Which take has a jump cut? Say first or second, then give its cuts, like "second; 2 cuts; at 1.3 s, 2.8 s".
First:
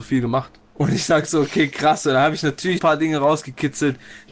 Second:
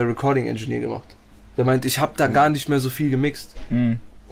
first; 1 cut; at 2.8 s